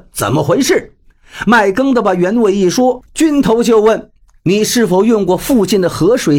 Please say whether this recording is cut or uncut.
cut